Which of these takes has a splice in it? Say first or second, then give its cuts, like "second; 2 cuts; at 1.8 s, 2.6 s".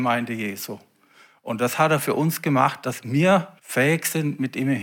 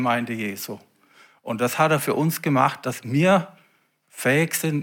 first; 1 cut; at 3.6 s